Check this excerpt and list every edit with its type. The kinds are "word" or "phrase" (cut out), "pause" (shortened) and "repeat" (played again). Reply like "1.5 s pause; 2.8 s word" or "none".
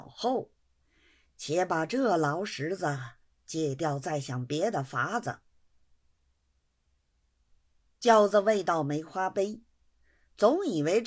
none

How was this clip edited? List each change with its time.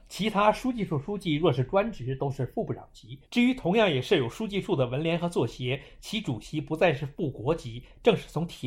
3.2 s pause

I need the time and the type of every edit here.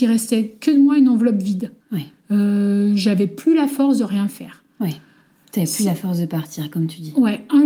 1.8 s pause

